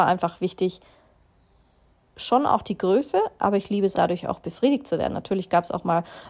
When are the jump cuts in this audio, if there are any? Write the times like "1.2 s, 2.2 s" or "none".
3.9 s